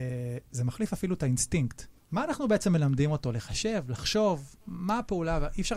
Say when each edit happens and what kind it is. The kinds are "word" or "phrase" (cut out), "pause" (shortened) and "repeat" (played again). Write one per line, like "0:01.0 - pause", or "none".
0:02.0 - pause
0:04.6 - pause